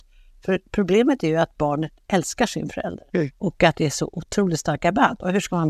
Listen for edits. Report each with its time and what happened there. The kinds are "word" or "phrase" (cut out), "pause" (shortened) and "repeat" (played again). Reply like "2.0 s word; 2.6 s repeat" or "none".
3.1 s pause